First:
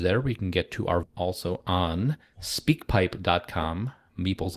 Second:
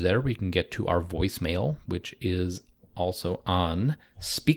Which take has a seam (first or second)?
first